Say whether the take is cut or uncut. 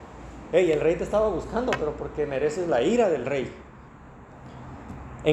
uncut